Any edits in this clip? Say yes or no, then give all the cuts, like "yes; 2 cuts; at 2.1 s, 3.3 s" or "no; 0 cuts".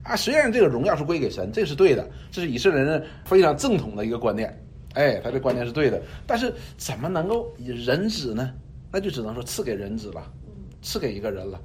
no; 0 cuts